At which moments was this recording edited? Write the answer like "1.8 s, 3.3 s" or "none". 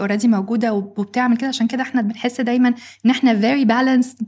none